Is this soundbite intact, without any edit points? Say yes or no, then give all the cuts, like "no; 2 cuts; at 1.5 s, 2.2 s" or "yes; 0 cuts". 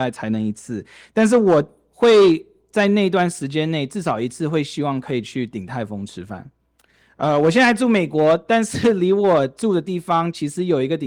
yes; 0 cuts